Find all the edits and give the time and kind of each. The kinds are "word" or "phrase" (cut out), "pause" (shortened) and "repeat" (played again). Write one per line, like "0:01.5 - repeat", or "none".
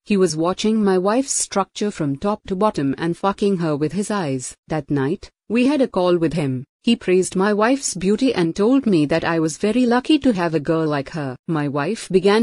0:04.6 - pause
0:06.7 - pause
0:11.4 - pause